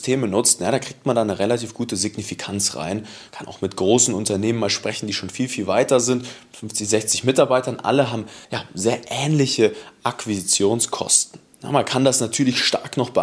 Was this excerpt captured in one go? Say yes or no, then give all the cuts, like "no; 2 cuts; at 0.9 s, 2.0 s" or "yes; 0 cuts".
no; 2 cuts; at 3.3 s, 8.4 s